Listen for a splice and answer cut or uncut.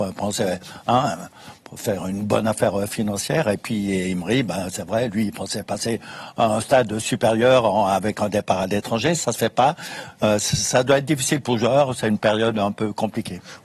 uncut